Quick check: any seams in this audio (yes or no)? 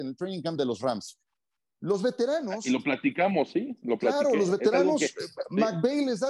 no